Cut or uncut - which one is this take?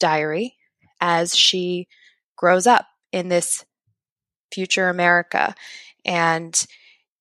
uncut